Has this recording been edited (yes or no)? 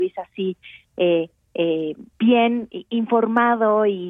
yes